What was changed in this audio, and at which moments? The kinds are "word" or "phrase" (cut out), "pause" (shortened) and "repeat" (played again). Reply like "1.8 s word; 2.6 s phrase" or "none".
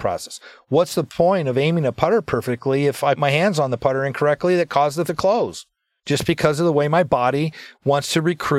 3.2 s word; 5.1 s word